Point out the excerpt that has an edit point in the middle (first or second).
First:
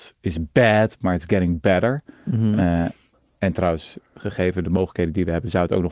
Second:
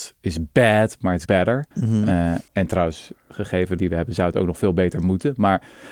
second